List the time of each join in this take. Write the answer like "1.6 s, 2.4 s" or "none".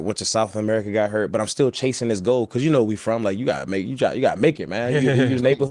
none